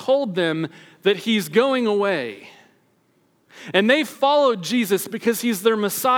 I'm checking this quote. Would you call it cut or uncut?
uncut